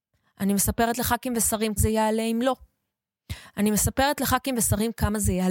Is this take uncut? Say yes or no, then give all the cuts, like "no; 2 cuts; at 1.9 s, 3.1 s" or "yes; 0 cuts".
no; 1 cut; at 1.8 s